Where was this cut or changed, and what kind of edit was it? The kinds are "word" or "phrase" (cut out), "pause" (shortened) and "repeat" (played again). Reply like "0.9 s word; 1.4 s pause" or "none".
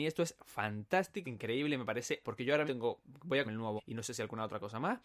1.2 s word; 2.2 s word; 2.7 s word; 3.4 s word; 3.8 s word